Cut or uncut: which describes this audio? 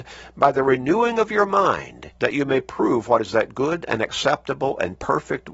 cut